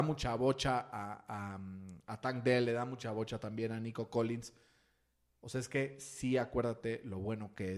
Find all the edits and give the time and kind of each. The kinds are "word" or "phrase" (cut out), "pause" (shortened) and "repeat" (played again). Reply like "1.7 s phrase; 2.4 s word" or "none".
none